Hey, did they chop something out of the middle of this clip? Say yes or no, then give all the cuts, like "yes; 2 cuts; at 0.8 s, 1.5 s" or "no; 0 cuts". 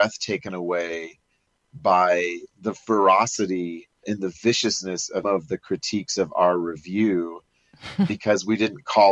yes; 3 cuts; at 2.5 s, 4.0 s, 5.2 s